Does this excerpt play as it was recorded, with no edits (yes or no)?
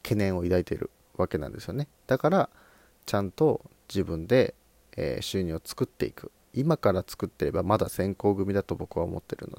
yes